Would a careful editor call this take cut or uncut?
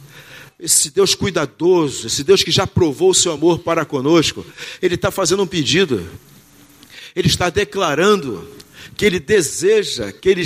uncut